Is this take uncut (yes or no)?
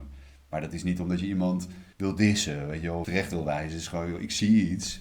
no